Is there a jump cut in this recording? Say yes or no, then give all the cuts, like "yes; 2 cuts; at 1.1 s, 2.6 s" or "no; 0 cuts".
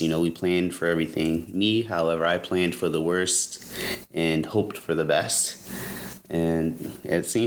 no; 0 cuts